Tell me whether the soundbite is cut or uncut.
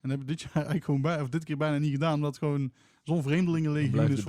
uncut